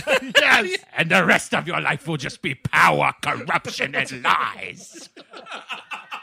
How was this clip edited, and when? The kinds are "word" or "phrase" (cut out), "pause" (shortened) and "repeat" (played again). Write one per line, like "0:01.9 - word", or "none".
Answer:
none